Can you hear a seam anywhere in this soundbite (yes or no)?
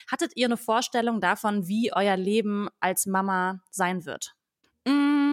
no